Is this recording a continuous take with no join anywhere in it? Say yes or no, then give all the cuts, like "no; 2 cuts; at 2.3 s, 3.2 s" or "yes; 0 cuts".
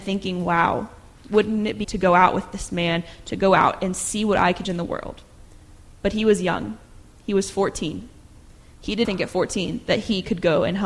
no; 3 cuts; at 1.8 s, 4.6 s, 9.0 s